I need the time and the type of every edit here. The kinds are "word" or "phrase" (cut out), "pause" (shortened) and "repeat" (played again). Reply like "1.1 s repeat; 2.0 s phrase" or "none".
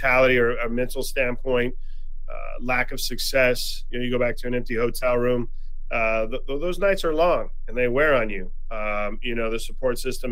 none